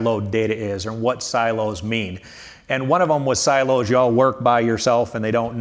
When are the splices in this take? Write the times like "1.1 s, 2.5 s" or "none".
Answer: none